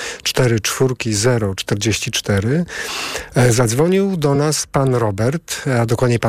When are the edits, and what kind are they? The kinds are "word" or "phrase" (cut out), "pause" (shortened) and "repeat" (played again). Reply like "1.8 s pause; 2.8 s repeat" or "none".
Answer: none